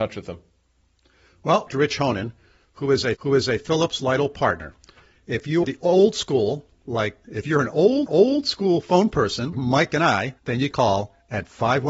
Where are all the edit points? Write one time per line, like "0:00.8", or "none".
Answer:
0:01.7
0:03.1
0:05.6
0:07.2
0:08.1
0:09.5
0:10.4
0:10.7